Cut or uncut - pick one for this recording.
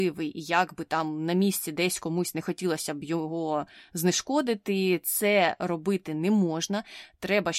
uncut